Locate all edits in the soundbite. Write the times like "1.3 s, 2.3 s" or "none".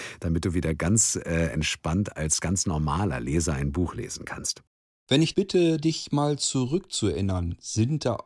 5.3 s